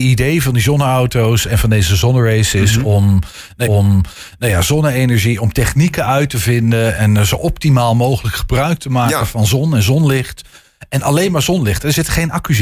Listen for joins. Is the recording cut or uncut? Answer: cut